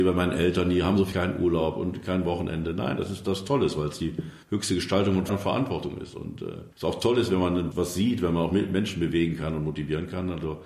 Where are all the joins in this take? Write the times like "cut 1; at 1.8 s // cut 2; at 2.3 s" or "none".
cut 1; at 1.1 s // cut 2; at 4.4 s // cut 3; at 5.3 s // cut 4; at 6.7 s // cut 5; at 7.7 s